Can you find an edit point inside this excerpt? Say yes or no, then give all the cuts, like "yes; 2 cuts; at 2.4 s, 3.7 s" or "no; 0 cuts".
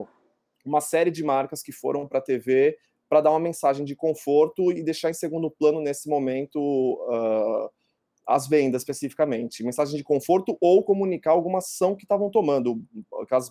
no; 0 cuts